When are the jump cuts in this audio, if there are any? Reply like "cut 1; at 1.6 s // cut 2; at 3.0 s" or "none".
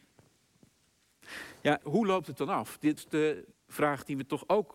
cut 1; at 1.8 s // cut 2; at 3.0 s // cut 3; at 3.5 s

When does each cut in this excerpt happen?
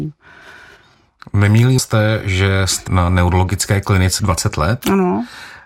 cut 1; at 1.8 s // cut 2; at 2.9 s // cut 3; at 4.2 s

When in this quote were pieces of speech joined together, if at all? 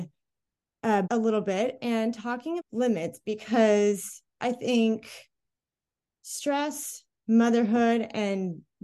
cut 1; at 1.0 s // cut 2; at 2.6 s // cut 3; at 4.3 s

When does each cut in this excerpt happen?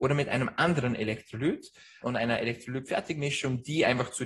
cut 1; at 2.0 s

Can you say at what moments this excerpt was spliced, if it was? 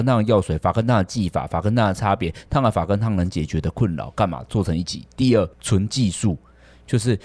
cut 1; at 5.5 s

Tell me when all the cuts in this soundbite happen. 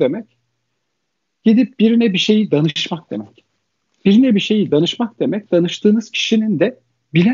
none

